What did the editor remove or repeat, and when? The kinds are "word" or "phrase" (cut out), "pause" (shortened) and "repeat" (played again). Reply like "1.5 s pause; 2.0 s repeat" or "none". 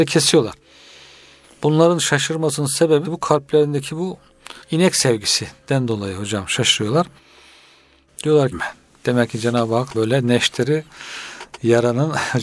3.0 s word; 4.6 s pause; 8.5 s phrase; 9.9 s word